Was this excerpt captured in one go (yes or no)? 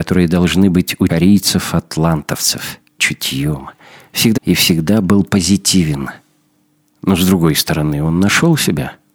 no